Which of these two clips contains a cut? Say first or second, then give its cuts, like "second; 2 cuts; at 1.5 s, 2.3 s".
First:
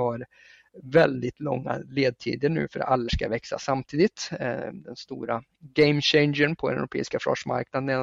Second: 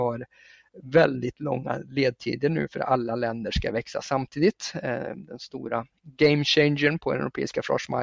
first; 1 cut; at 3.1 s